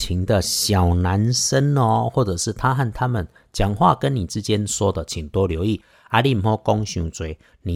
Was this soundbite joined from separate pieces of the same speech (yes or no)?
no